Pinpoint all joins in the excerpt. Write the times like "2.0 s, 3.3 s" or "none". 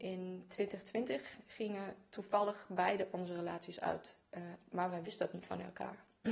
none